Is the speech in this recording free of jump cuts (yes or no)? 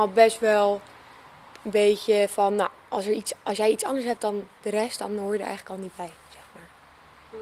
yes